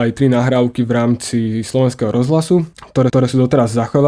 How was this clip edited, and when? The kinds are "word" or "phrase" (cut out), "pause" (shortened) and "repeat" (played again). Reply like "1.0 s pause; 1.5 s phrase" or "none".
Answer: 3.1 s repeat